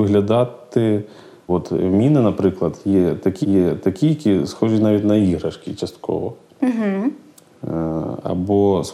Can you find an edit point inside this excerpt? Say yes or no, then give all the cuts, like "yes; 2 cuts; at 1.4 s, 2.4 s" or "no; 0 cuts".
yes; 2 cuts; at 1.5 s, 3.4 s